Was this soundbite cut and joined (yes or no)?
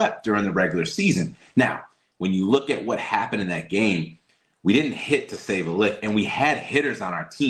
no